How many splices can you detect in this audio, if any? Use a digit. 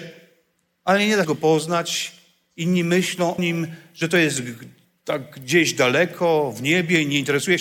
2